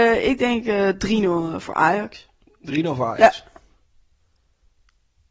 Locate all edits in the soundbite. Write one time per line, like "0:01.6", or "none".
none